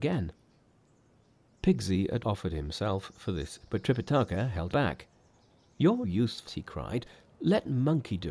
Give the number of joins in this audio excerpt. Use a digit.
5